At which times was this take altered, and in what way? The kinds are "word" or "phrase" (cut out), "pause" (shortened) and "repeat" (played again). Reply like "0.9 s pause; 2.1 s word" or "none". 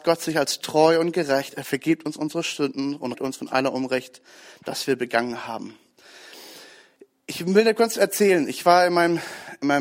3.1 s word